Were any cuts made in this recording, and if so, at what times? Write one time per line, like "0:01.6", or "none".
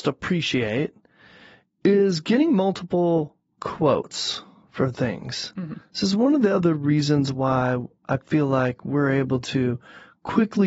none

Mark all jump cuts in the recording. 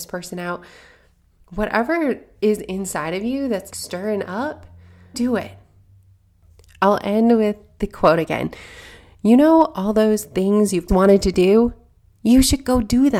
0:03.7
0:05.1
0:10.9

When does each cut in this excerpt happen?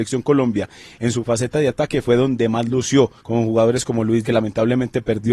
0:03.2
0:04.2

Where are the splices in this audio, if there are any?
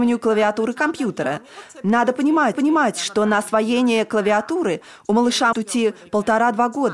0:02.5
0:05.5

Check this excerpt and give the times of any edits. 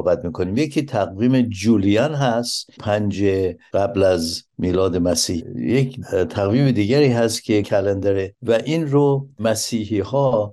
0:02.8
0:07.6

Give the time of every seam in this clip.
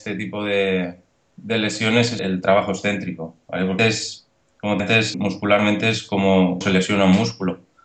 0:02.2
0:03.8
0:04.8
0:05.1
0:06.6

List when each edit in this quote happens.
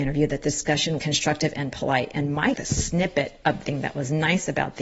0:01.0
0:02.5
0:03.6

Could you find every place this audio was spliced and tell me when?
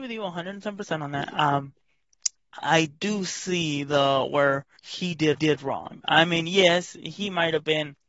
0:04.8
0:05.4

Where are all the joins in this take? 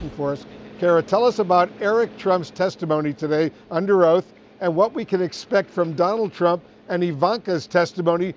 none

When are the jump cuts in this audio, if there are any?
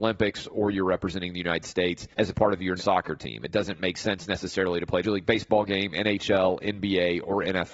0:02.1
0:02.8
0:05.0

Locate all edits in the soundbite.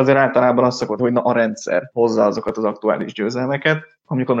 0:01.0

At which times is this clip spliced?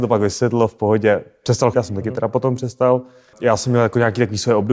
0:01.7
0:03.3

